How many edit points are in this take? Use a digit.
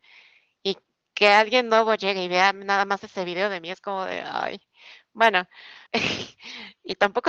1